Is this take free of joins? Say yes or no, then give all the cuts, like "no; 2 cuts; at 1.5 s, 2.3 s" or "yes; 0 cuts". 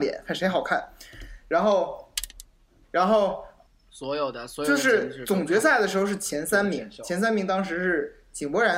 no; 2 cuts; at 2.8 s, 3.7 s